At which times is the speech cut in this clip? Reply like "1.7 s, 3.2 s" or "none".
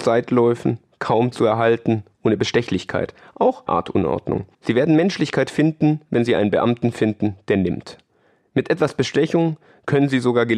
3.7 s, 4.5 s

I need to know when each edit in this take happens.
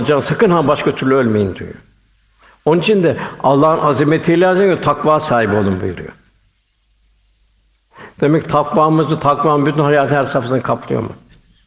none

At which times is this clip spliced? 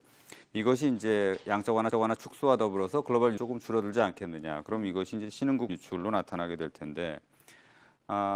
1.9 s, 3.4 s, 5.7 s

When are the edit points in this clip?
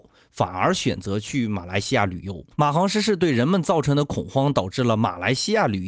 2.5 s

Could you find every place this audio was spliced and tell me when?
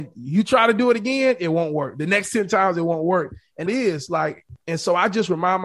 3.7 s

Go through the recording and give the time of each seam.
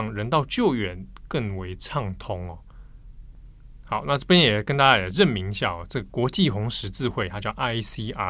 none

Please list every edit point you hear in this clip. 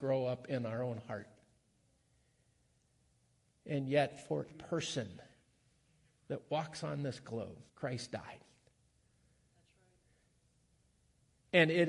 4.5 s, 7.7 s

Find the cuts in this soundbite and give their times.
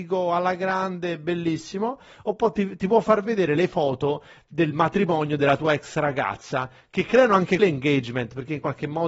7.6 s

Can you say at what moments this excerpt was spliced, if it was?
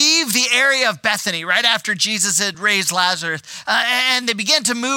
none

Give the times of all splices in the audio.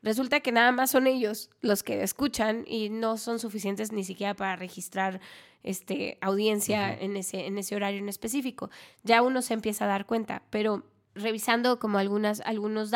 11.2 s

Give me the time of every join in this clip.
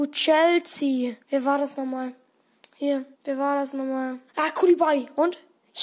1.2 s, 3.1 s, 4.3 s

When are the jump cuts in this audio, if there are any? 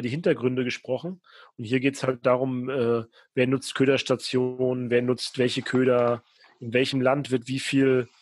none

